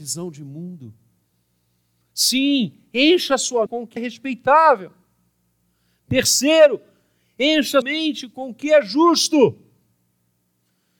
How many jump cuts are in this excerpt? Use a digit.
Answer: 3